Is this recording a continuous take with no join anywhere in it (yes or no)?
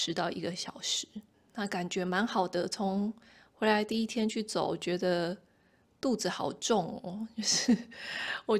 yes